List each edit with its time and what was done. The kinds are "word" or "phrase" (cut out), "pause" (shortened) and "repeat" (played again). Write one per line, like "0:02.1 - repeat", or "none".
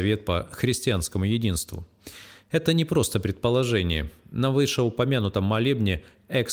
none